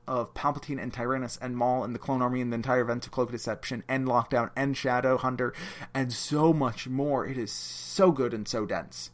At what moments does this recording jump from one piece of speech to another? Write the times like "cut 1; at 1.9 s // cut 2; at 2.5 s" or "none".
none